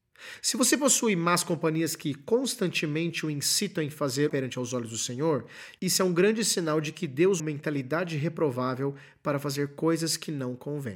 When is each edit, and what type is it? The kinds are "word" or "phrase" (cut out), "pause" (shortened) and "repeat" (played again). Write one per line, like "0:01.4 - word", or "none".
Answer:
0:04.3 - phrase
0:07.4 - phrase

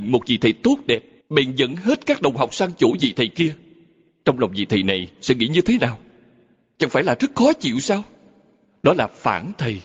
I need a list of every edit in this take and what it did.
0:01.2 - pause

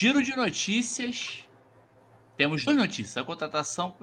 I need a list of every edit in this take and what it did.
0:02.7 - word

